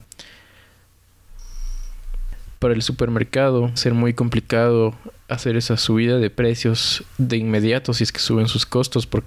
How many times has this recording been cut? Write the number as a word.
one